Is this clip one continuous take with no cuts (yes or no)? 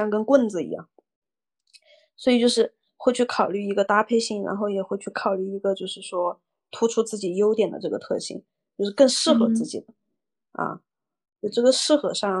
yes